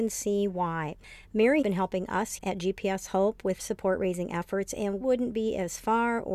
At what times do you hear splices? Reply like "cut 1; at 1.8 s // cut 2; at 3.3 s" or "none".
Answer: cut 1; at 1.6 s // cut 2; at 2.4 s // cut 3; at 3.6 s // cut 4; at 5.0 s